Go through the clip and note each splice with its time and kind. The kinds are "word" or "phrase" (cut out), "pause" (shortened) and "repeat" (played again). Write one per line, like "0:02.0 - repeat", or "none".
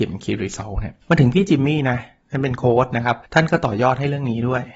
0:01.0 - pause
0:03.2 - pause